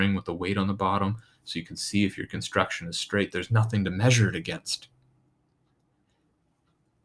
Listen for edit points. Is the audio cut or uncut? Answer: uncut